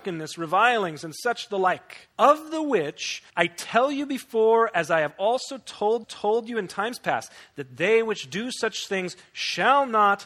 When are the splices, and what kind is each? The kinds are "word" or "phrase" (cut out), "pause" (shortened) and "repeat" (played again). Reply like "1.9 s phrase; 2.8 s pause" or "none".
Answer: 2.1 s pause; 3.3 s pause; 6.0 s repeat